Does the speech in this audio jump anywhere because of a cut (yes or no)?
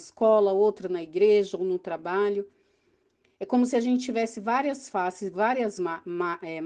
no